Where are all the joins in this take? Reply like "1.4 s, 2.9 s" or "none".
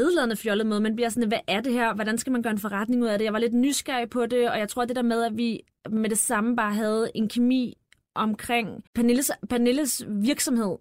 8.9 s